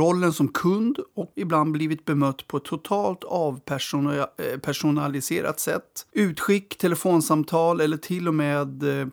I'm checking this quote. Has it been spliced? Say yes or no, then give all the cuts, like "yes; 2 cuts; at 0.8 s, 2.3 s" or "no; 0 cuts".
yes; 2 cuts; at 1.3 s, 6.1 s